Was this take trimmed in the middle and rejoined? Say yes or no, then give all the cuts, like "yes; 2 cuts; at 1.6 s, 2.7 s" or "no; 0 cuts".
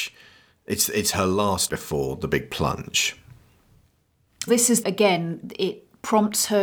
yes; 3 cuts; at 1.7 s, 4.5 s, 4.8 s